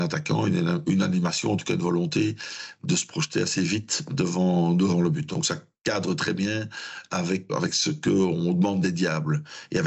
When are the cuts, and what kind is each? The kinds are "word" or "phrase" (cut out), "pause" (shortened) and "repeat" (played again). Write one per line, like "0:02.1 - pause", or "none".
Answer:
0:07.5 - word